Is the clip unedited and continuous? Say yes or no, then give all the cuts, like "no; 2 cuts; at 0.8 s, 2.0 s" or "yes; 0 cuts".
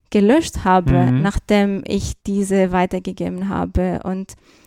no; 1 cut; at 2.2 s